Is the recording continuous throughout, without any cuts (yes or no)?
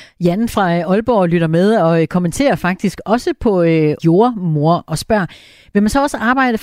no